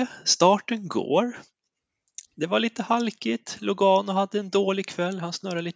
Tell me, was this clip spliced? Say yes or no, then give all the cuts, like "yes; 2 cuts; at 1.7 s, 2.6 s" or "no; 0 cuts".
yes; 1 cut; at 2.3 s